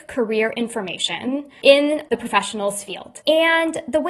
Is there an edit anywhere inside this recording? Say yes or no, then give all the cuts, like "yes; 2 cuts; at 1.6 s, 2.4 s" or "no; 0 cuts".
no; 0 cuts